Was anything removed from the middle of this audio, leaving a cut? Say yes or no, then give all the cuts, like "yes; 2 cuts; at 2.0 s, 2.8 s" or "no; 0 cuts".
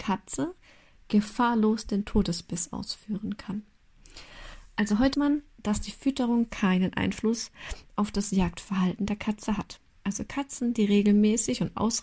yes; 2 cuts; at 5.1 s, 9.9 s